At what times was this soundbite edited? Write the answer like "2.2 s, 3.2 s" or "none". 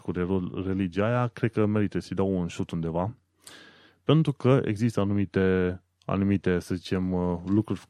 none

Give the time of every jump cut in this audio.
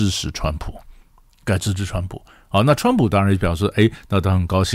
none

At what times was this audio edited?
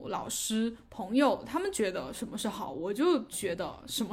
none

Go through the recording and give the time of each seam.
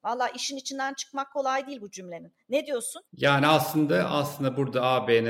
3.1 s

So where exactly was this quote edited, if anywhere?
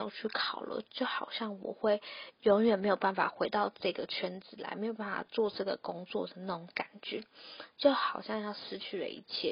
none

